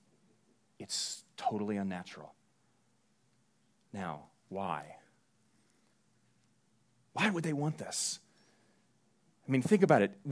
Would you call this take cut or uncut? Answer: uncut